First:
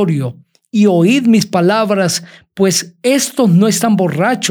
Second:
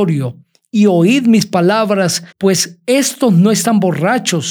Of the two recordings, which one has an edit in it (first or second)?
second